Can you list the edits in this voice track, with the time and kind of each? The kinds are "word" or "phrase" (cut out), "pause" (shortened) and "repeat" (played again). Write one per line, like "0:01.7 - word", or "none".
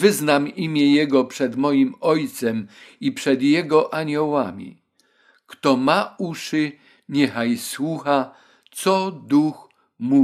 none